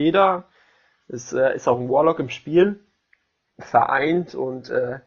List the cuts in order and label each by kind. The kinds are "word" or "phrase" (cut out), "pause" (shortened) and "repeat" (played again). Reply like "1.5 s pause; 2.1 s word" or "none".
none